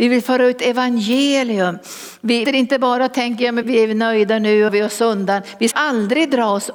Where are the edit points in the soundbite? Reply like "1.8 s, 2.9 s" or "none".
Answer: 2.5 s, 3.6 s, 4.7 s, 5.7 s